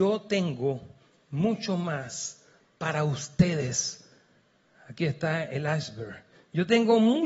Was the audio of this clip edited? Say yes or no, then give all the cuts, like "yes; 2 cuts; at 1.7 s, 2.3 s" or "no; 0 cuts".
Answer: no; 0 cuts